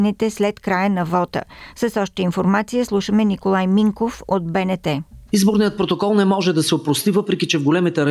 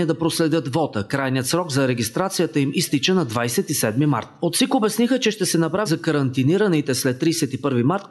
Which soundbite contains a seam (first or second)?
second